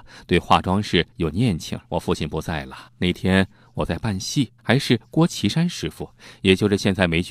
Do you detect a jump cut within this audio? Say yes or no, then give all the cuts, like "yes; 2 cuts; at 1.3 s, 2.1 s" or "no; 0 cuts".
yes; 4 cuts; at 1.1 s, 1.8 s, 2.9 s, 4.6 s